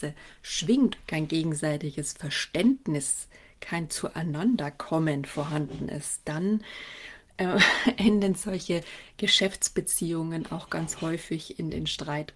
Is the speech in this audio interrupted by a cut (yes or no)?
yes